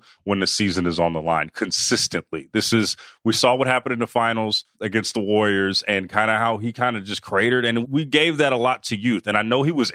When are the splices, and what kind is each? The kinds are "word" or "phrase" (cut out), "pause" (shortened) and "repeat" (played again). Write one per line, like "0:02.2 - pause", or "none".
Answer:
0:04.7 - pause
0:07.8 - word